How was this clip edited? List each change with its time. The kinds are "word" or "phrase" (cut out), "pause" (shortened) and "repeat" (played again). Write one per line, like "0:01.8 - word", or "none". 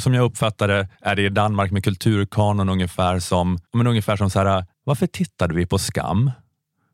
0:00.9 - pause
0:03.7 - pause
0:04.7 - pause